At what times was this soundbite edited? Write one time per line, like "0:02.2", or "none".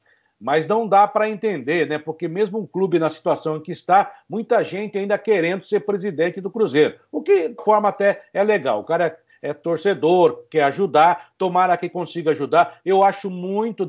0:07.6